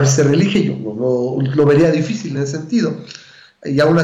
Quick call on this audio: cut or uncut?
uncut